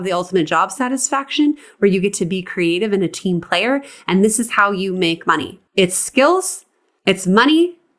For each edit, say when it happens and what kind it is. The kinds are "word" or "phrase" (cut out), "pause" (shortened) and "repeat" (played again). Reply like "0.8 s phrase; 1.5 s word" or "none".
5.7 s pause